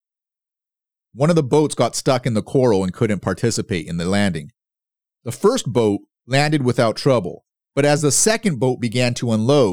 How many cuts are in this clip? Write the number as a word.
zero